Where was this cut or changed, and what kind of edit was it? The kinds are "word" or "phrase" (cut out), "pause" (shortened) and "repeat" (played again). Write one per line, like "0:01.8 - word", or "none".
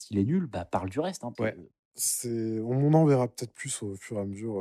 0:01.4 - word